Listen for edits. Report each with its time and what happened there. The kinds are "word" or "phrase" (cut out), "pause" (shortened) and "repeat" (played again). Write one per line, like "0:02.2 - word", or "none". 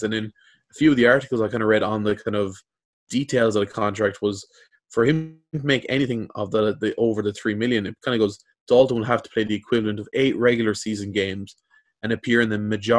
none